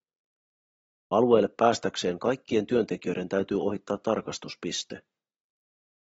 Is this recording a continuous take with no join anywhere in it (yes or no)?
yes